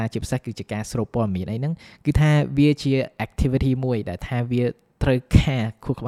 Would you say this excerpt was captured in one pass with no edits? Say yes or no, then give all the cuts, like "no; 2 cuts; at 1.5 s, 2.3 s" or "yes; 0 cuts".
yes; 0 cuts